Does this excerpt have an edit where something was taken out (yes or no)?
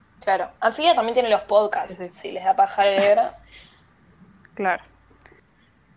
no